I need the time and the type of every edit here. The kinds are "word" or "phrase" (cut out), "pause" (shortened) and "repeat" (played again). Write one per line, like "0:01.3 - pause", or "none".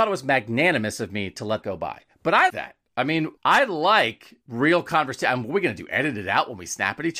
0:01.6 - word
0:02.5 - word
0:03.4 - pause
0:04.4 - pause

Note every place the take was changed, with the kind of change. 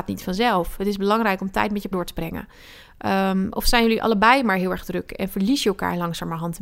0:01.9 - word

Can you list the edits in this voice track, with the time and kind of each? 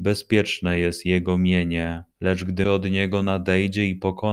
0:02.1 - pause
0:02.6 - word

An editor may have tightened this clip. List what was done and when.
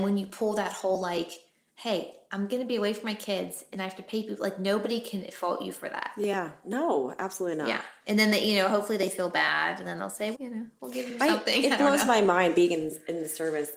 0:10.3 - word
0:11.2 - phrase

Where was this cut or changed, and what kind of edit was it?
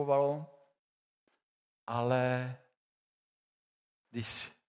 none

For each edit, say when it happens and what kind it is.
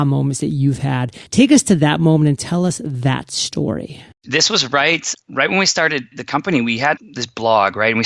0:01.3 - pause
0:04.1 - pause
0:05.1 - word
0:06.1 - word
0:07.0 - word

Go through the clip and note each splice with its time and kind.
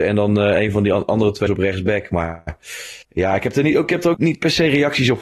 0:01.5 - word
0:03.0 - pause
0:04.1 - word

